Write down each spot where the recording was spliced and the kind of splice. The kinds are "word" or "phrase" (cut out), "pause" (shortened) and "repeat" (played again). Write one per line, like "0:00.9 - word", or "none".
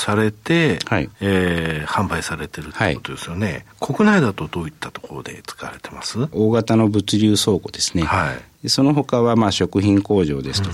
0:01.1 - pause